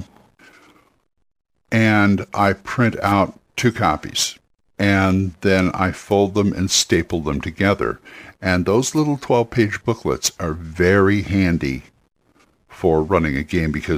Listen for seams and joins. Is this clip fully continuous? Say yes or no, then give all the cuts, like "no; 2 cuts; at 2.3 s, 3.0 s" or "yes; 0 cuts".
no; 2 cuts; at 3.5 s, 4.5 s